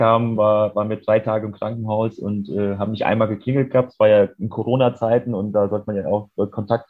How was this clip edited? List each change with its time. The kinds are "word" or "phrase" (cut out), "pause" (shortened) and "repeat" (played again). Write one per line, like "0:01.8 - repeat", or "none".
none